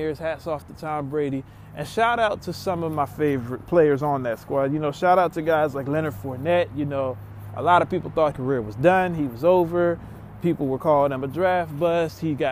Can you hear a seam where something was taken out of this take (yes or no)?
yes